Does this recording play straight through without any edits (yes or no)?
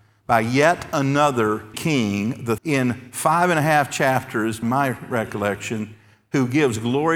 no